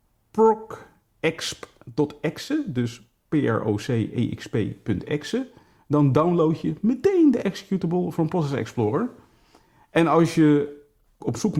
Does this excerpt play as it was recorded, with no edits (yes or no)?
yes